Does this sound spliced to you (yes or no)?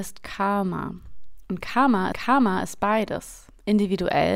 yes